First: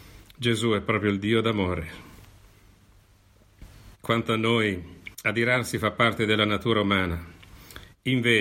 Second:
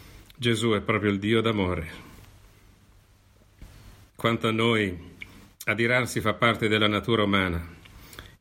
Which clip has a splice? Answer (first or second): first